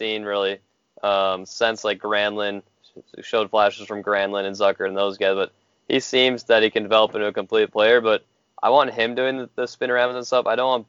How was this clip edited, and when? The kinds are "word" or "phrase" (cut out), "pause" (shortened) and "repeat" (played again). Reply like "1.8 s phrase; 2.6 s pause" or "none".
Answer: none